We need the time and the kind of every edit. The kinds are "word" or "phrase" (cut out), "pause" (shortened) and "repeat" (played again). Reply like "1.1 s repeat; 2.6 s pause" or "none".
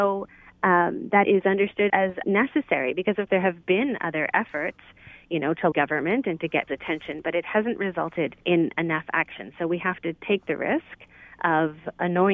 1.2 s word; 1.9 s word; 2.2 s word; 3.3 s word; 5.7 s word; 6.7 s word; 8.4 s pause